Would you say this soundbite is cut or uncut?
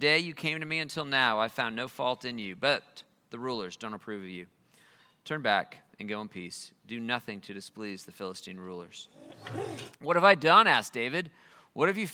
uncut